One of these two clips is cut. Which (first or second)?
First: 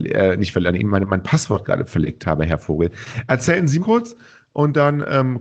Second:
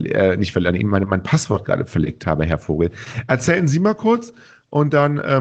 first